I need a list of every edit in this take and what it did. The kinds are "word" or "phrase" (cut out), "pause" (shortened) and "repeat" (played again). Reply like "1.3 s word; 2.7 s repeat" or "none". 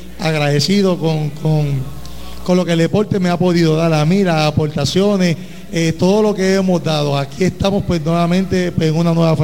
none